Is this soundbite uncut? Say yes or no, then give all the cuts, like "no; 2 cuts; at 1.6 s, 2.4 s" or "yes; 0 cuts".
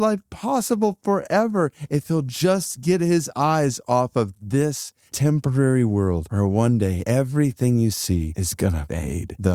yes; 0 cuts